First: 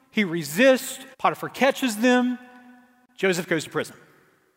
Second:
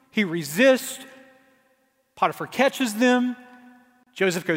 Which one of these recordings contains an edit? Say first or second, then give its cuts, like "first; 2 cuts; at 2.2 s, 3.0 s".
first; 1 cut; at 1.1 s